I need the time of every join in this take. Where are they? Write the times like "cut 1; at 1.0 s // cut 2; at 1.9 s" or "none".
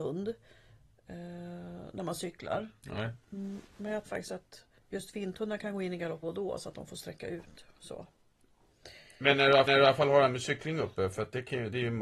cut 1; at 4.0 s // cut 2; at 4.8 s // cut 3; at 6.2 s // cut 4; at 9.7 s